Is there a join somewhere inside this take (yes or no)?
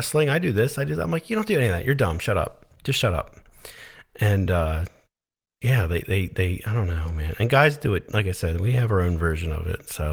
no